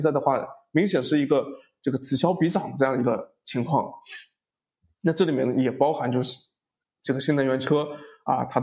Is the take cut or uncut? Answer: uncut